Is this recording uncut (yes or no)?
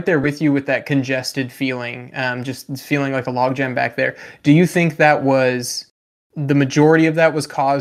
yes